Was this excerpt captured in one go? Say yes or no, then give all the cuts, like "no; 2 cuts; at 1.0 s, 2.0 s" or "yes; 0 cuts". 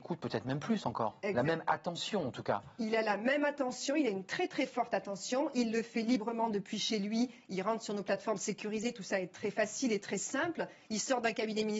yes; 0 cuts